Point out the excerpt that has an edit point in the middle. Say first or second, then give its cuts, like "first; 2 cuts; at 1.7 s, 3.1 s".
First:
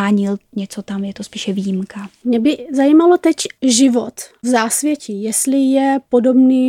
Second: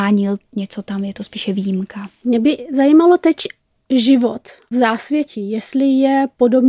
first; 1 cut; at 3.6 s